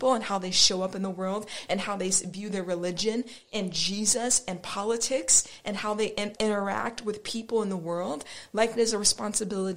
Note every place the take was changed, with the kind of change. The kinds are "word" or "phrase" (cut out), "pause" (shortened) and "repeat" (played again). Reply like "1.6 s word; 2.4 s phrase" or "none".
6.4 s word; 8.7 s word